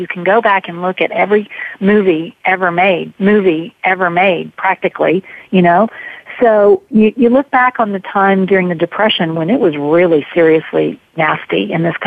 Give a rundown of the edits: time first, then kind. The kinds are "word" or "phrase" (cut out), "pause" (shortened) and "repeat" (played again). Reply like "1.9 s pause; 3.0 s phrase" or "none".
3.2 s repeat